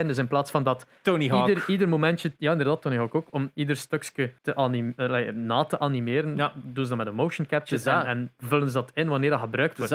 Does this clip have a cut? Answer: yes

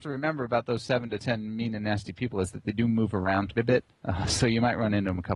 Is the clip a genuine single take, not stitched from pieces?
no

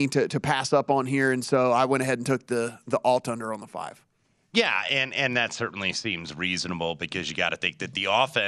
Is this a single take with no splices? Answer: yes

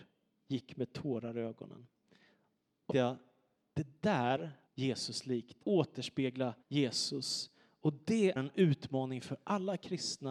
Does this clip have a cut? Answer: yes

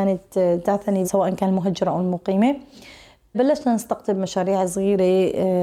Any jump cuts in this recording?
yes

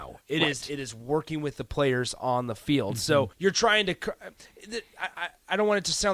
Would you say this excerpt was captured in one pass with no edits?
no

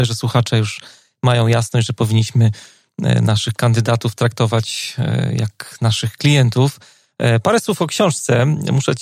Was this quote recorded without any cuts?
yes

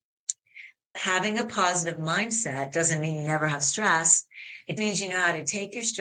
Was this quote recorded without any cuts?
no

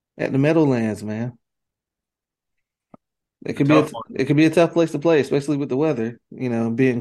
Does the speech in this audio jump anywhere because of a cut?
no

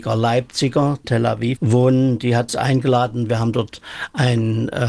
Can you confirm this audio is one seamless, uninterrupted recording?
no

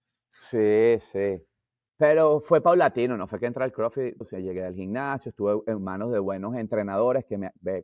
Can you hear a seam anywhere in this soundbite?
yes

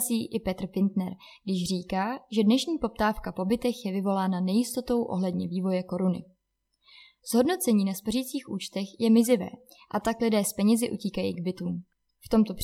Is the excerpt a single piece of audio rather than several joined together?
yes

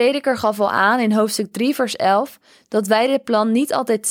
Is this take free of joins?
yes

